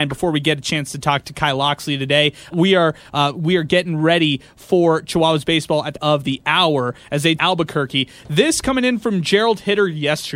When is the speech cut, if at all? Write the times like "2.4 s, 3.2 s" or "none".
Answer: 2.5 s, 5.9 s, 7.4 s